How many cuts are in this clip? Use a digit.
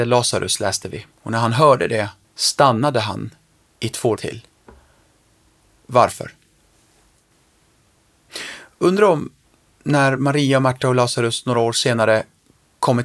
4